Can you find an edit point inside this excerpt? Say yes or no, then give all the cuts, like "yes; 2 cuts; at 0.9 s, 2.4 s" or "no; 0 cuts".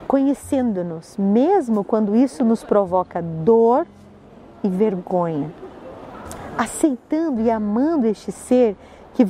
no; 0 cuts